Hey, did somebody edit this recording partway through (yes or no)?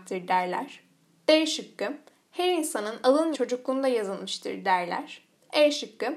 yes